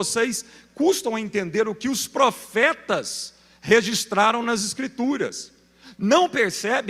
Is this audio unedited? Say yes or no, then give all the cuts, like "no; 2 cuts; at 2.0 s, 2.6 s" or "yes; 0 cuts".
yes; 0 cuts